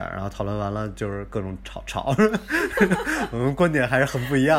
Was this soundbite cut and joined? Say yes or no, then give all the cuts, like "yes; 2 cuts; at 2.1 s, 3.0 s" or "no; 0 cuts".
no; 0 cuts